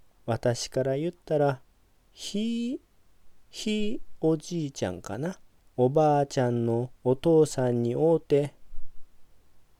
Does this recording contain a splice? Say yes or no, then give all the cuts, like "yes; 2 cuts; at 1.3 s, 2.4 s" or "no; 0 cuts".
yes; 3 cuts; at 1.7 s, 5.6 s, 7.0 s